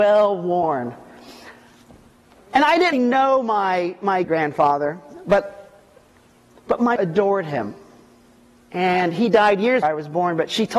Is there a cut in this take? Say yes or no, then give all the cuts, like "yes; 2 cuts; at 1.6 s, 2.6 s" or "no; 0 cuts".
yes; 4 cuts; at 2.9 s, 4.2 s, 7.0 s, 9.8 s